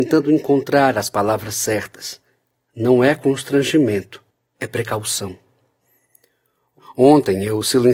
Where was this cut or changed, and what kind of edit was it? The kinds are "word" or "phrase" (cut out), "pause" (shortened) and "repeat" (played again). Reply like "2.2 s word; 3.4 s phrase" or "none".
4.3 s pause